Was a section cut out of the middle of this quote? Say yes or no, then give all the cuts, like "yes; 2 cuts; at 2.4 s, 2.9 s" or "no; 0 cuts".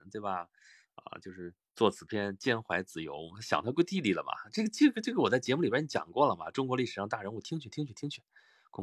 yes; 1 cut; at 1.6 s